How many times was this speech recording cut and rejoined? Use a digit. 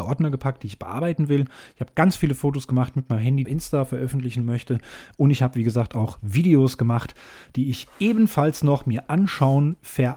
1